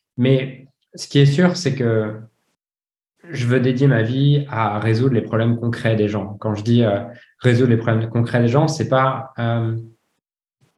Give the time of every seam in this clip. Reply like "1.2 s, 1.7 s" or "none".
none